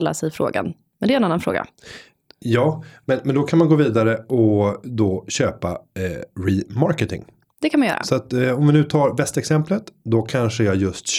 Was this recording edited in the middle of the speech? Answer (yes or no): no